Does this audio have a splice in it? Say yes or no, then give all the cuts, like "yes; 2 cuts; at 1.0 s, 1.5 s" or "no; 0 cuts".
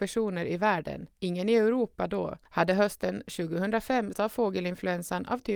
yes; 3 cuts; at 1.1 s, 2.5 s, 4.1 s